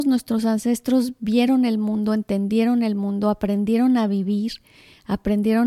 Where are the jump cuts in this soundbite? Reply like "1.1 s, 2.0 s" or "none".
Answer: none